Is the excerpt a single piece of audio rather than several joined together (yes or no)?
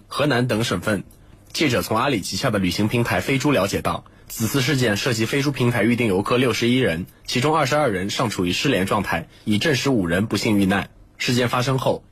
yes